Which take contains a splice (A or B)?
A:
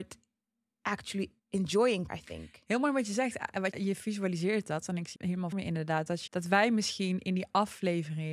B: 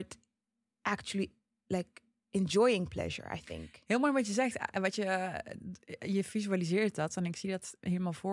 A